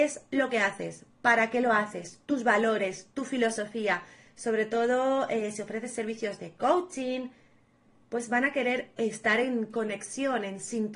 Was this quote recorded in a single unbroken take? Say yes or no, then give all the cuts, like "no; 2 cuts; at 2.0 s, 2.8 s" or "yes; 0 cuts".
yes; 0 cuts